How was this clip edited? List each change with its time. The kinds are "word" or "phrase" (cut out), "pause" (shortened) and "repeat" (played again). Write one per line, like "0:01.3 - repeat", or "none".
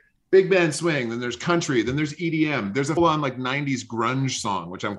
0:03.0 - word